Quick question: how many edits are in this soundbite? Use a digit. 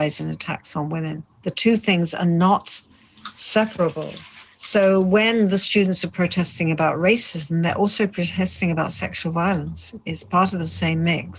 2